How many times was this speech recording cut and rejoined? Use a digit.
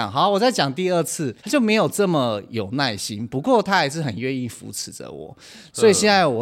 1